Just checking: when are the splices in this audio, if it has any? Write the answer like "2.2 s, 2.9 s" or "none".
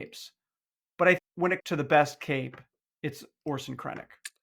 1.2 s, 1.6 s